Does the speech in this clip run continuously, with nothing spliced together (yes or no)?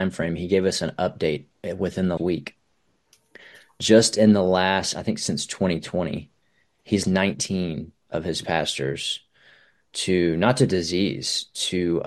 no